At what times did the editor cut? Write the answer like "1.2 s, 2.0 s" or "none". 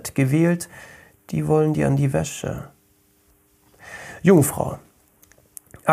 none